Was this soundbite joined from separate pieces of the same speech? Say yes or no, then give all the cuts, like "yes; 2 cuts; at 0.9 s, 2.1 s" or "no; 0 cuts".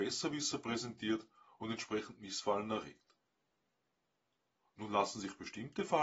no; 0 cuts